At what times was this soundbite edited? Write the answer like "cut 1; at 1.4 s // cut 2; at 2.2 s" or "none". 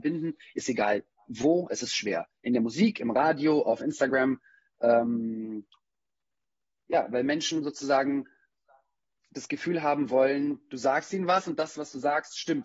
none